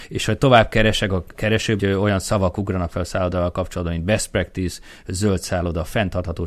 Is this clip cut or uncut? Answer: cut